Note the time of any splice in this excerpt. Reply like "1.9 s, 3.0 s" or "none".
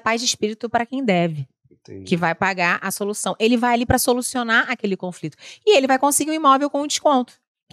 none